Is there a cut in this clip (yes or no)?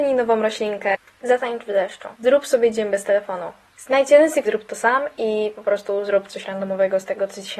yes